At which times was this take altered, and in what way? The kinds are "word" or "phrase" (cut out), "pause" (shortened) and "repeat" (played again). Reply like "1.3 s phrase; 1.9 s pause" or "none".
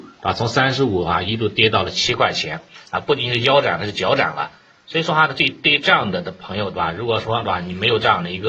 none

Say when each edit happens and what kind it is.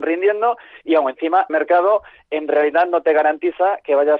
1.5 s word

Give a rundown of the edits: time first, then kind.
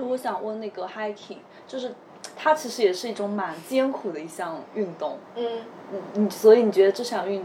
none

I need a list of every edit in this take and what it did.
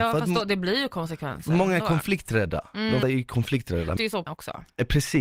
3.0 s word; 4.0 s word; 4.3 s word

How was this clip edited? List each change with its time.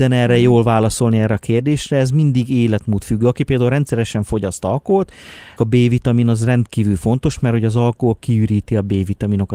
5.6 s word

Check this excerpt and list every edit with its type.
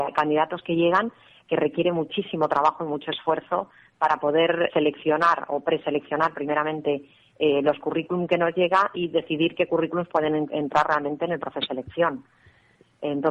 4.7 s word; 11.7 s word

